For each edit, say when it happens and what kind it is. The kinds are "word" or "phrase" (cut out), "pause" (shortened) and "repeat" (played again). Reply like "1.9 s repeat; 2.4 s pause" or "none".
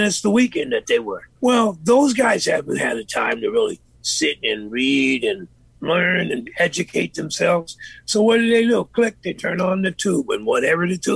1.4 s pause